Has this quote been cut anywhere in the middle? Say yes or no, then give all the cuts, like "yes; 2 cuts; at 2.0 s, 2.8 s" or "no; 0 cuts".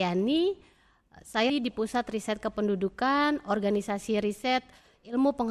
yes; 1 cut; at 1.5 s